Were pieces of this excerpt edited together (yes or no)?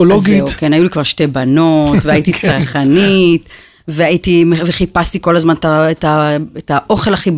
no